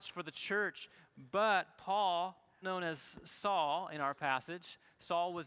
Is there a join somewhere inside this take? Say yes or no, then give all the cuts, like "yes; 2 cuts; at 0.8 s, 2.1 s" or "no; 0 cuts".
yes; 1 cut; at 2.6 s